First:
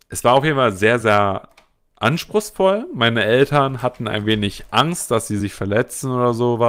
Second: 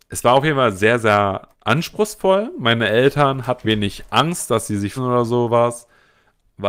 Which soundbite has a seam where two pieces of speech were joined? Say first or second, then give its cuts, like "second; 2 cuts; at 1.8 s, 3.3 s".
second; 3 cuts; at 1.5 s, 3.6 s, 5.0 s